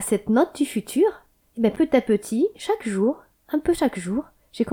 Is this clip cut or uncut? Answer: uncut